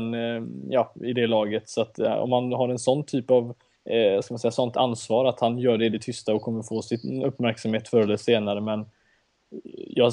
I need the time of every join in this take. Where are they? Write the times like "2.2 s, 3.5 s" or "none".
3.8 s